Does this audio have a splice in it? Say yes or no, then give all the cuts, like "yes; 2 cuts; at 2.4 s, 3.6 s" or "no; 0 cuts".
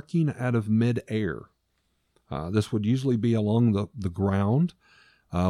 no; 0 cuts